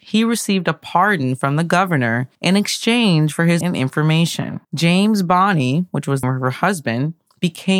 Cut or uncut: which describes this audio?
cut